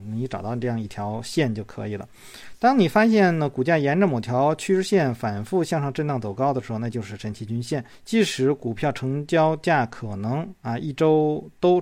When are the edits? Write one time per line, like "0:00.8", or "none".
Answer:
0:07.9